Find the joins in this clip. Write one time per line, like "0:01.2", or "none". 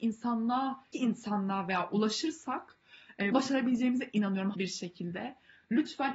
0:00.9
0:03.3
0:04.5